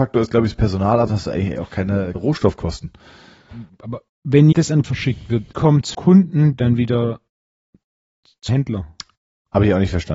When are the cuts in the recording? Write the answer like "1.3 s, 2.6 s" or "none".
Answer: 1.1 s, 2.1 s, 4.5 s, 4.8 s, 5.5 s, 5.9 s, 8.5 s